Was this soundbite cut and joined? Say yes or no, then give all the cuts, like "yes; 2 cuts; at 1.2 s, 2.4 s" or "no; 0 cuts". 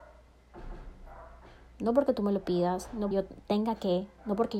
yes; 1 cut; at 3.1 s